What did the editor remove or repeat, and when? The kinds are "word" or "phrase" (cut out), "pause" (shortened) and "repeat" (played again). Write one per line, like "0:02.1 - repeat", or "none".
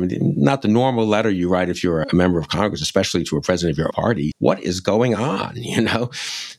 0:02.0 - word
0:03.9 - word
0:04.3 - word